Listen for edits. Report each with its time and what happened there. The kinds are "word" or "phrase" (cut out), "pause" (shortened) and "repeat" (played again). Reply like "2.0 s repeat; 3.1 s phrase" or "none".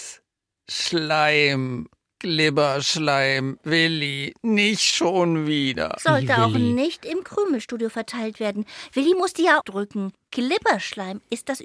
9.6 s phrase